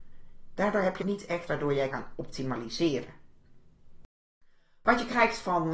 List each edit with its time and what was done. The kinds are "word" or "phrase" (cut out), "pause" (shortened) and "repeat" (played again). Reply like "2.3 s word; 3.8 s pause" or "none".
1.0 s word; 1.5 s word; 1.9 s word